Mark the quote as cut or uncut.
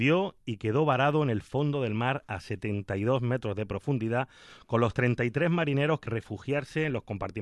cut